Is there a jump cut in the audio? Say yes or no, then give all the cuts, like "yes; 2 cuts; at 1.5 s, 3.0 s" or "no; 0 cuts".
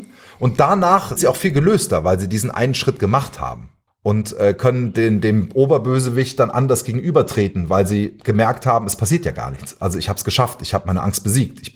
yes; 2 cuts; at 1.2 s, 3.9 s